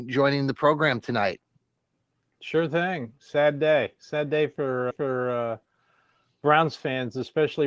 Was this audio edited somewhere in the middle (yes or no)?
yes